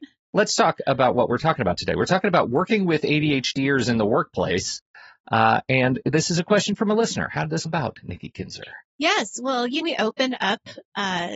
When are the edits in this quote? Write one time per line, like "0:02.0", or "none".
0:07.7
0:09.8